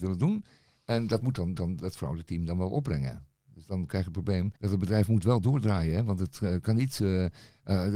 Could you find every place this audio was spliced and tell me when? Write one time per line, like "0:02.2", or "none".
0:01.6
0:04.6